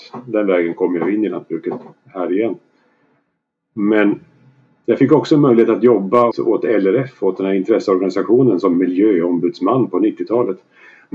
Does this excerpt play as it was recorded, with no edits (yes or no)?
no